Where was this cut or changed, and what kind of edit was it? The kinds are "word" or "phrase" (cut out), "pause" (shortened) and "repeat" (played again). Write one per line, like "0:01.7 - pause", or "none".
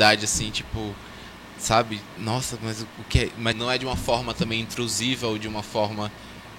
0:03.5 - word